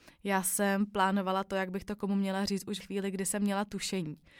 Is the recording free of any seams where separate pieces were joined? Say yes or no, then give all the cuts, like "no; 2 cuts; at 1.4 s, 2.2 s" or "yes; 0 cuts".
no; 1 cut; at 2.8 s